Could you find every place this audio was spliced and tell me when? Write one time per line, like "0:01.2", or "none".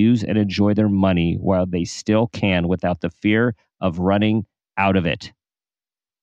none